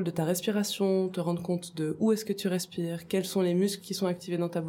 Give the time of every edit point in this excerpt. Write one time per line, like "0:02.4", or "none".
none